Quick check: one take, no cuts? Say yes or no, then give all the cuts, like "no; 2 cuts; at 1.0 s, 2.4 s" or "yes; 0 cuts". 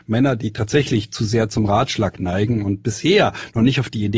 yes; 0 cuts